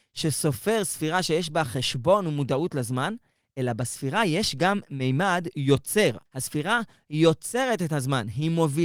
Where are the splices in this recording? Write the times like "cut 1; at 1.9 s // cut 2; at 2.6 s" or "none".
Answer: cut 1; at 6.3 s